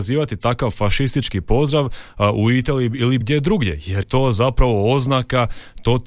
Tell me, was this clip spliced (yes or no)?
yes